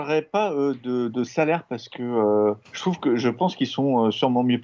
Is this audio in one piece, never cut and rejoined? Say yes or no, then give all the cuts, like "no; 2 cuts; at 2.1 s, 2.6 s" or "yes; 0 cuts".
no; 1 cut; at 2.6 s